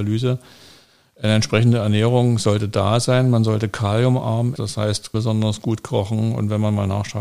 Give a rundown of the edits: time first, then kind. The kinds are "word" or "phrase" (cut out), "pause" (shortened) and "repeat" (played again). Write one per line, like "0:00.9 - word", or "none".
0:04.6 - word
0:05.1 - word